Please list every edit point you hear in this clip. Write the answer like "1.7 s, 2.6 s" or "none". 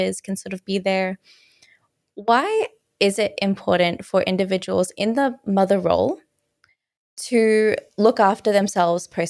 none